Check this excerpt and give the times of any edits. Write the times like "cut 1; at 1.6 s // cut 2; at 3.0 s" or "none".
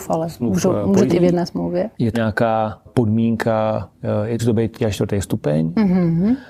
cut 1; at 1.1 s // cut 2; at 2.1 s // cut 3; at 2.9 s // cut 4; at 4.4 s // cut 5; at 4.8 s